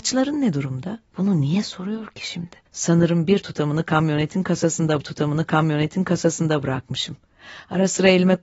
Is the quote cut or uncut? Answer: cut